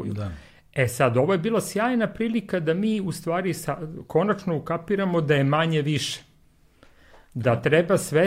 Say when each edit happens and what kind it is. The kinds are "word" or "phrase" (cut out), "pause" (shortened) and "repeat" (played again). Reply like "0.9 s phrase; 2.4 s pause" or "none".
none